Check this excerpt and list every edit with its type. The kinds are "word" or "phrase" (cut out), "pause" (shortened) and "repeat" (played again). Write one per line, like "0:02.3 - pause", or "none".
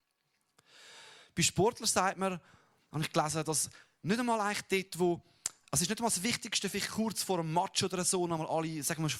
none